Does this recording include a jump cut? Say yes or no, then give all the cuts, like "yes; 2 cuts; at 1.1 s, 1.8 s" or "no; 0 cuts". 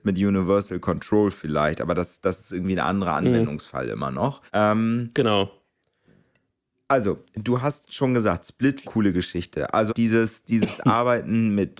yes; 3 cuts; at 4.5 s, 8.8 s, 9.9 s